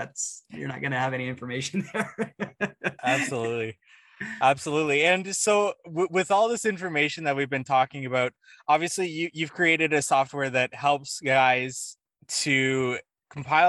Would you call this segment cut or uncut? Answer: uncut